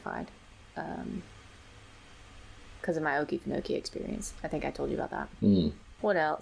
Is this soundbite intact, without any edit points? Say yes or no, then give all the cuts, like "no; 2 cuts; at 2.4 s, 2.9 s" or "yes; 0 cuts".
yes; 0 cuts